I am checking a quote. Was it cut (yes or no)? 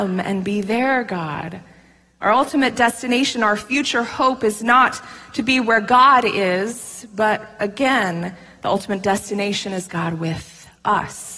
no